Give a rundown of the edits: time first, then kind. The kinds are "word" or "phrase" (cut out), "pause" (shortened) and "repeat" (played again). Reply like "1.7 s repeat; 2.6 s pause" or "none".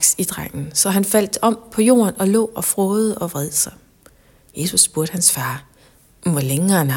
none